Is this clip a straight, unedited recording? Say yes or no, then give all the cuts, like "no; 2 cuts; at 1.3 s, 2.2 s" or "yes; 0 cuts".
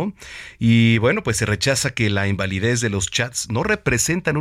yes; 0 cuts